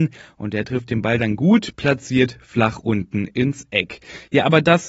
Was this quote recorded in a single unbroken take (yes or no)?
yes